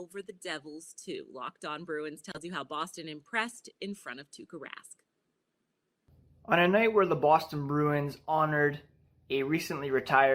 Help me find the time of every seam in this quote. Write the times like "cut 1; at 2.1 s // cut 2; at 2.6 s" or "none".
none